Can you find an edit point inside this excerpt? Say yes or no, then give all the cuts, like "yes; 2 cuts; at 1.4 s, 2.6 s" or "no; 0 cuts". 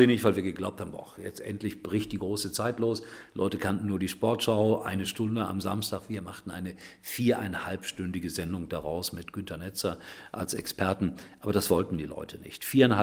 no; 0 cuts